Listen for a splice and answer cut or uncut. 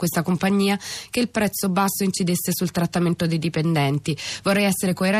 uncut